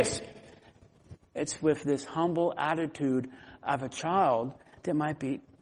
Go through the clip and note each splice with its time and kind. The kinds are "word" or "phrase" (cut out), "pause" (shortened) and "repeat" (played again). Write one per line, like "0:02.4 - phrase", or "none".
none